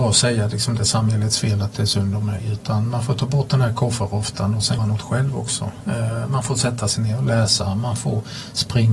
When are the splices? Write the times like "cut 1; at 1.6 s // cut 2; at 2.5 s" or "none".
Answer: cut 1; at 4.8 s